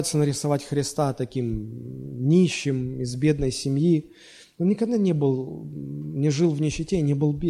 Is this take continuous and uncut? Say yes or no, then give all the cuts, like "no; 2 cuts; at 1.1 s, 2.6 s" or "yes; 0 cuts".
yes; 0 cuts